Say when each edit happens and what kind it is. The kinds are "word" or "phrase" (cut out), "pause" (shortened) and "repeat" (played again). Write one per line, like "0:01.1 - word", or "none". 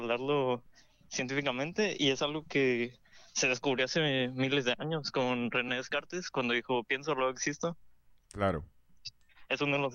none